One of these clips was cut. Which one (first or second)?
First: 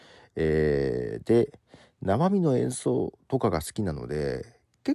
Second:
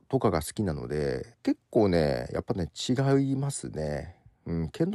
second